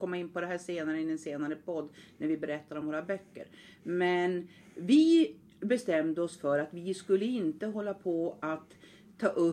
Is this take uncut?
yes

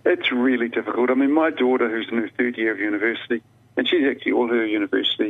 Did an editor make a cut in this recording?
no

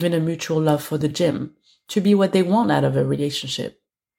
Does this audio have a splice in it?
no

